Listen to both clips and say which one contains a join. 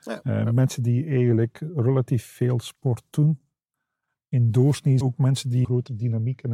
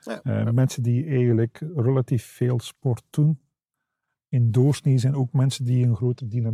first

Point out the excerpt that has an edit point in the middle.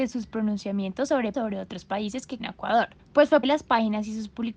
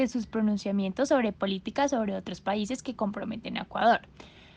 first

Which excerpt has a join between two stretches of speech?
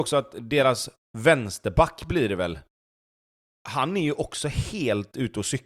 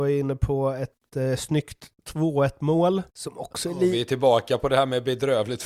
second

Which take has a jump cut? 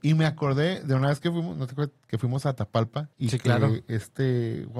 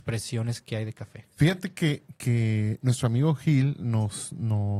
first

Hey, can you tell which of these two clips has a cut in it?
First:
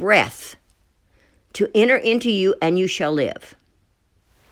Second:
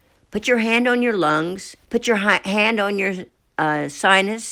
second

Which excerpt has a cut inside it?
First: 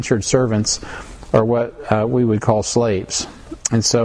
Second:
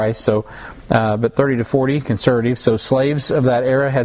second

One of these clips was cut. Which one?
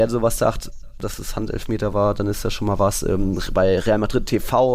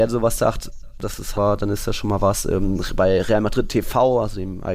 second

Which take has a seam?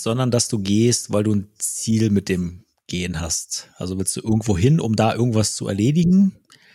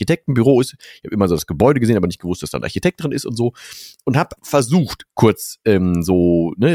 second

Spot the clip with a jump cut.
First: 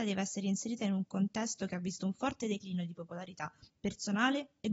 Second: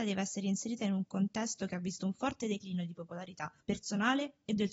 second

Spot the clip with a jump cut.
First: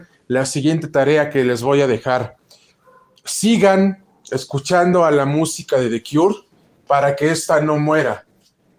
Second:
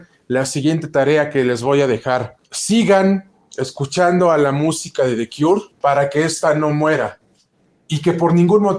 second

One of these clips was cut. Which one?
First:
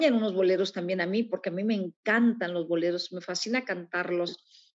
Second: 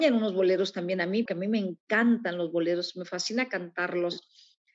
second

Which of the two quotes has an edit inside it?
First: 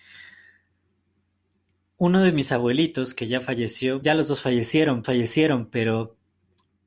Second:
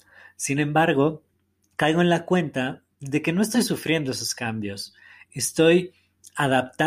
first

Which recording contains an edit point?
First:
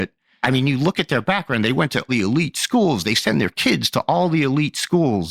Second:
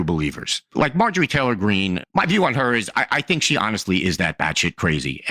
first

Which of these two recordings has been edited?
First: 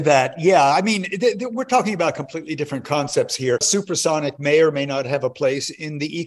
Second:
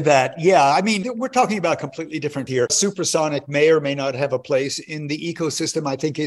second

